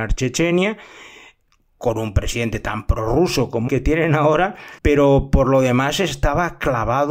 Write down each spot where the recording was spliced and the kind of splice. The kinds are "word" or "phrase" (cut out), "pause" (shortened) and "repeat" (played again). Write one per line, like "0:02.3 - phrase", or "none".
0:03.7 - word
0:04.8 - pause